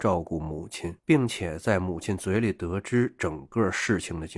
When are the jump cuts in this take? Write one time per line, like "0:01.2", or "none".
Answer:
0:01.0